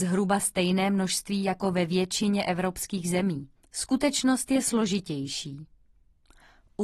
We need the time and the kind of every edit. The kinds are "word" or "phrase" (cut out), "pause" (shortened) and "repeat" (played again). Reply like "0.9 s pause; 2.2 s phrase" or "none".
3.6 s pause